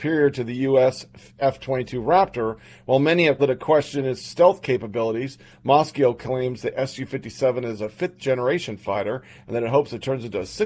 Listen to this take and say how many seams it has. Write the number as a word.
one